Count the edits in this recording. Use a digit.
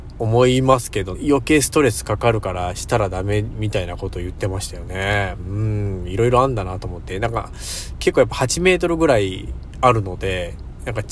1